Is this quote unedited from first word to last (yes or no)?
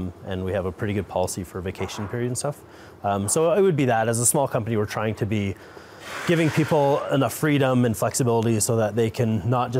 yes